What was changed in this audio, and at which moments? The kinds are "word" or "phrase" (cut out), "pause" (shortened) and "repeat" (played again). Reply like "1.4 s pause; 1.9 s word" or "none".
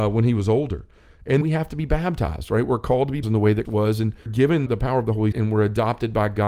1.4 s word; 3.2 s word; 3.6 s word; 4.3 s word; 4.7 s word; 5.3 s word